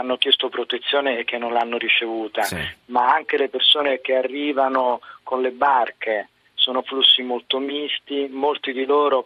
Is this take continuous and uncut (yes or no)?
yes